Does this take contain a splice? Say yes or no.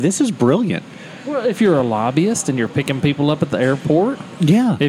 no